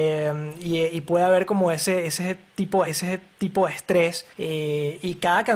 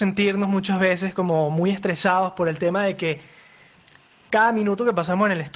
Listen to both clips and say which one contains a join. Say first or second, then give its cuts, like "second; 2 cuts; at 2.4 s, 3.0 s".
first; 2 cuts; at 2.9 s, 4.3 s